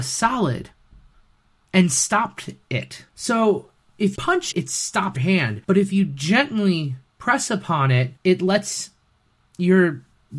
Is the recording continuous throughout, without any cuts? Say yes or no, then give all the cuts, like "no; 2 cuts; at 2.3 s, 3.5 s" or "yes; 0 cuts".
no; 7 cuts; at 3.1 s, 4.2 s, 4.5 s, 5.2 s, 5.6 s, 7.1 s, 8.2 s